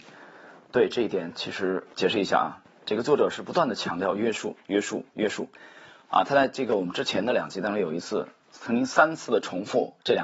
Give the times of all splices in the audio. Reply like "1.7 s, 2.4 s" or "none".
none

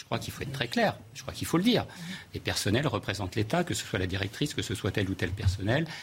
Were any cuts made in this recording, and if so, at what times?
none

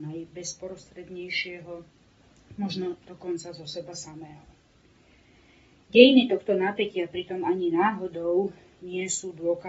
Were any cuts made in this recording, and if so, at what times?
none

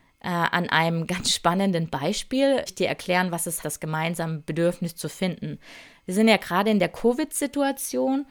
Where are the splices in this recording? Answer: 2.7 s, 3.6 s

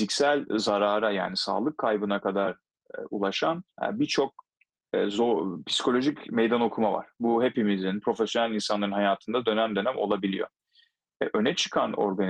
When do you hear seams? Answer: 3.7 s

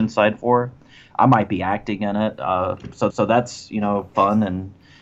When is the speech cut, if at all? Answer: 3.1 s

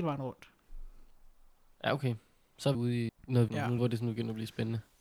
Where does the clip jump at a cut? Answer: 2.7 s, 3.1 s, 3.5 s, 3.8 s

